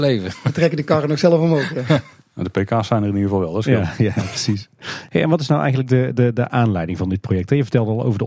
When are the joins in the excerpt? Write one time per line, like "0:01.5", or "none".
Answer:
none